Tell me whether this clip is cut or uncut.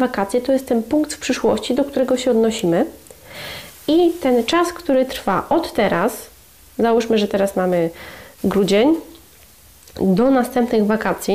uncut